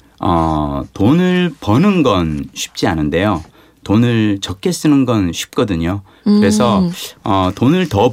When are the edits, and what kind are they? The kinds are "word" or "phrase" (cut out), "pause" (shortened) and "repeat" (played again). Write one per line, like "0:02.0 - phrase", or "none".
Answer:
none